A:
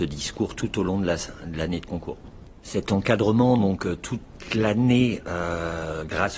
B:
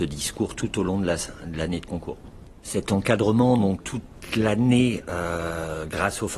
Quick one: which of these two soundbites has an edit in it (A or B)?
B